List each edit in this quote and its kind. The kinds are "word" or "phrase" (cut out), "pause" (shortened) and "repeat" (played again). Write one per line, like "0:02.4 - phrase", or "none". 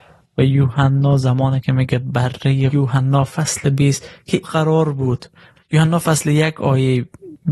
0:02.7 - phrase
0:04.4 - word